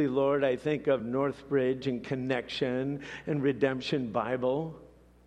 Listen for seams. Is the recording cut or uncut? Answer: uncut